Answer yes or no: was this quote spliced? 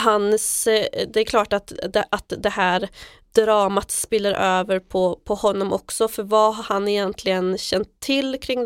no